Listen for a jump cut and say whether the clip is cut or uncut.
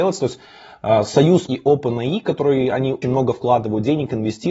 cut